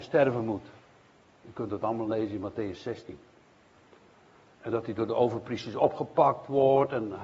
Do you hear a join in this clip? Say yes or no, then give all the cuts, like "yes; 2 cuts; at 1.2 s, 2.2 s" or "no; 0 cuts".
no; 0 cuts